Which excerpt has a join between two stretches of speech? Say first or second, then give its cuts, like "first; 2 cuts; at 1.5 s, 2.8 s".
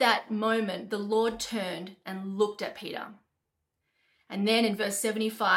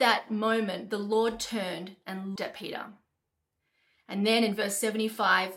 second; 1 cut; at 2.4 s